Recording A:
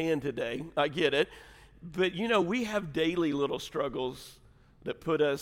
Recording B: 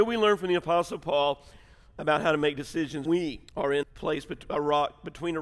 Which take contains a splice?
B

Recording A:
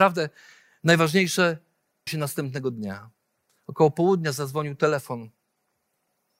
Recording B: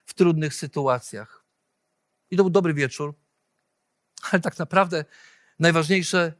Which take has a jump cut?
A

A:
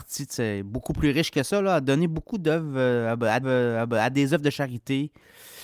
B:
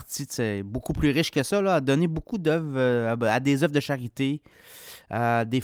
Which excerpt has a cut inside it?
A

